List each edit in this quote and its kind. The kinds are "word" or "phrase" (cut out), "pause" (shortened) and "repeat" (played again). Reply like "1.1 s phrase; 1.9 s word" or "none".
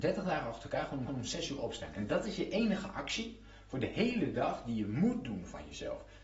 1.1 s repeat